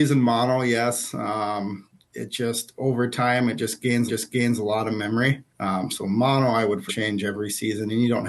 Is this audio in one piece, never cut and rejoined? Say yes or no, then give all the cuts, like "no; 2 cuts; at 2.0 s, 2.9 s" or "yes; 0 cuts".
no; 3 cuts; at 4.1 s, 5.5 s, 6.9 s